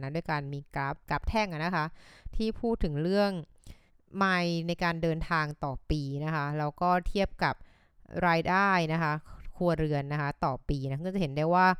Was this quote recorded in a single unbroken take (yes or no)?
no